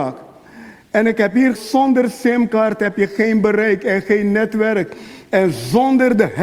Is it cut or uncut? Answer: cut